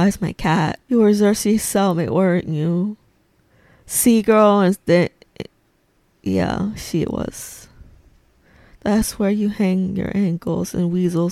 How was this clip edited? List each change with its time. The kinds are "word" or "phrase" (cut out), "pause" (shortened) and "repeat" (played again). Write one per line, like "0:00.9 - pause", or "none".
none